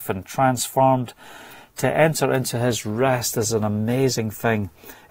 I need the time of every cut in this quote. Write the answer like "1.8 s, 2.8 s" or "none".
none